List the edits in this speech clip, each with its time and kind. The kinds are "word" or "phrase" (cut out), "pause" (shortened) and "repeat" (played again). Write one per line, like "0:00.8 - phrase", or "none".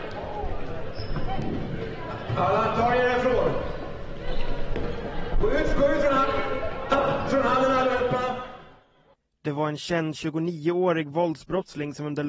0:07.3 - word